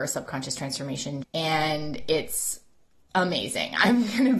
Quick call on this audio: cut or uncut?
cut